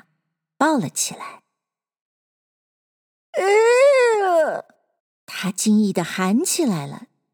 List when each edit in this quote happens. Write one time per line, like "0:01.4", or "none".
0:05.0